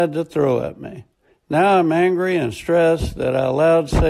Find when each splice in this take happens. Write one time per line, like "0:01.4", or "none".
0:01.3